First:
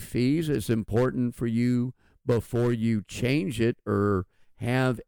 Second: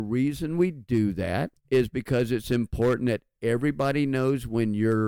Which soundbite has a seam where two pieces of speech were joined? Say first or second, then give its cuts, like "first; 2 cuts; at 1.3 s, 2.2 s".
second; 1 cut; at 1.6 s